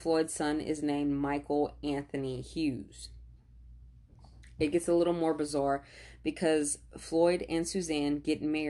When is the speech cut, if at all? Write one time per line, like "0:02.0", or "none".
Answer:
none